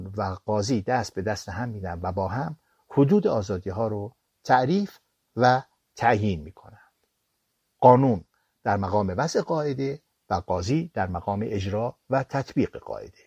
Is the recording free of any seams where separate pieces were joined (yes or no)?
yes